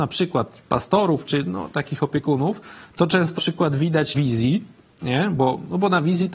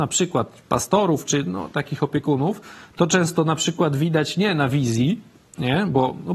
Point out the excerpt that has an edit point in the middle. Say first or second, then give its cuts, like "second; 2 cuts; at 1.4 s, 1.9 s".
first; 2 cuts; at 3.4 s, 4.1 s